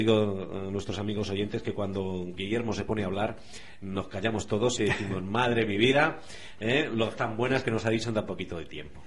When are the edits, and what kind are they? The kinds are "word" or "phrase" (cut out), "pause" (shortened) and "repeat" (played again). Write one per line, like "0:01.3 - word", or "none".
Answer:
0:04.8 - word
0:07.2 - word